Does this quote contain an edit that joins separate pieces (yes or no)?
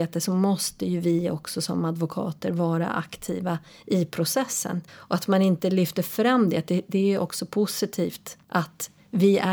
yes